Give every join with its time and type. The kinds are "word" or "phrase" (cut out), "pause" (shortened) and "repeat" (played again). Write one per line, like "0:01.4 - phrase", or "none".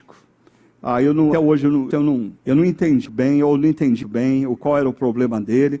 0:01.3 - word
0:01.9 - word
0:02.4 - pause
0:03.0 - word
0:04.0 - word
0:04.6 - word